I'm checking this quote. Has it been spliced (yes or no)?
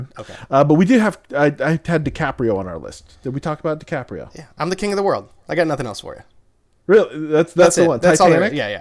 no